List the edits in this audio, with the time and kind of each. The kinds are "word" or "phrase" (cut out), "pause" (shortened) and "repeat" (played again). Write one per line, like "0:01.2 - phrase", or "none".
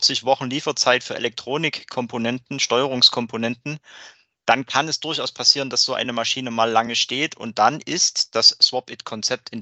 none

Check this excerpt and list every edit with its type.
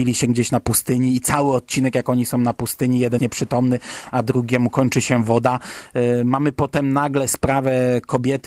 0:03.2 - word

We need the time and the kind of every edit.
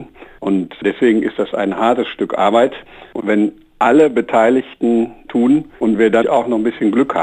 0:03.2 - phrase
0:05.3 - word
0:05.7 - pause
0:06.2 - word

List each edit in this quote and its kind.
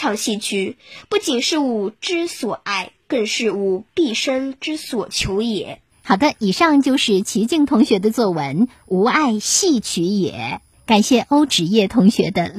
0:03.0 - pause

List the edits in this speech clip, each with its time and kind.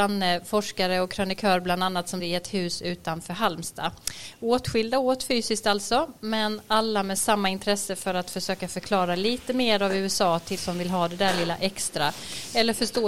0:02.2 - word
0:10.6 - word

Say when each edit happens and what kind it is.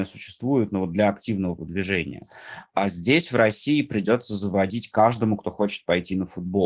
0:01.6 - word

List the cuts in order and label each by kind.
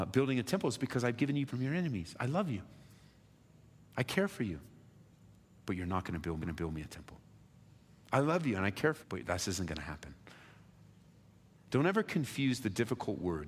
0:01.5 - word
0:06.4 - repeat
0:09.0 - word

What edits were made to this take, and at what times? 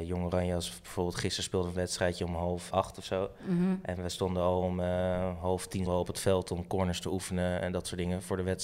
0:02.7 - word
0:05.9 - word

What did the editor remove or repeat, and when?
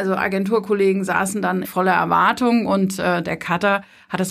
0:01.6 - phrase

